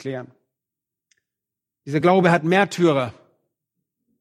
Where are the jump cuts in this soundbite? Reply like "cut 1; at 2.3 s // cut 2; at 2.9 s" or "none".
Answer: none